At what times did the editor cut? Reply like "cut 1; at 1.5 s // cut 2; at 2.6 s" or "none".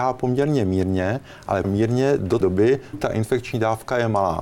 cut 1; at 1.6 s // cut 2; at 2.4 s // cut 3; at 2.9 s